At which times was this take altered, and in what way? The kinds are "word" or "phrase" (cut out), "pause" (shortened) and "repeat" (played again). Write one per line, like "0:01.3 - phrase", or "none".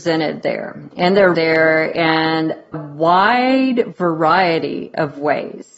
0:01.3 - word
0:02.7 - word